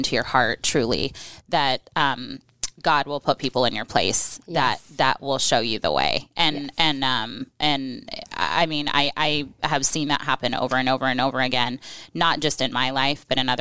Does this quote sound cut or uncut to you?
cut